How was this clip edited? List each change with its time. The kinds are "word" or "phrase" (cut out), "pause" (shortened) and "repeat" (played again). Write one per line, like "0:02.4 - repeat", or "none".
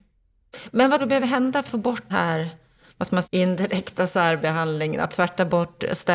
0:01.0 - word
0:01.7 - word
0:02.1 - word
0:03.2 - word